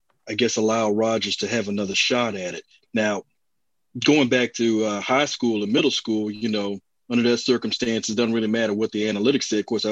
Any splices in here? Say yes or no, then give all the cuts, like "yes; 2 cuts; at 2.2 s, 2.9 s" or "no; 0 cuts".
no; 0 cuts